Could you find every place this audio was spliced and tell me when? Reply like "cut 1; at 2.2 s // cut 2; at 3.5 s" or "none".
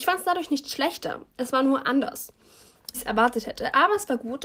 cut 1; at 2.9 s